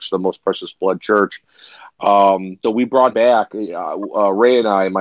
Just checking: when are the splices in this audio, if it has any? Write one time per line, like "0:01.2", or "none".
0:02.6
0:03.1